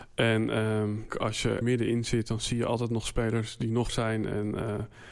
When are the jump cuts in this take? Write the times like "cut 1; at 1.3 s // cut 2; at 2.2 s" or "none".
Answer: cut 1; at 1.1 s // cut 2; at 1.6 s // cut 3; at 3.9 s